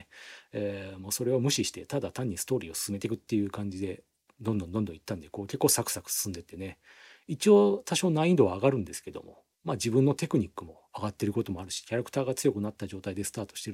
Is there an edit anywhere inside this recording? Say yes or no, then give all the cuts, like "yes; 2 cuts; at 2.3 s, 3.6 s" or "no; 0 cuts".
yes; 1 cut; at 9.5 s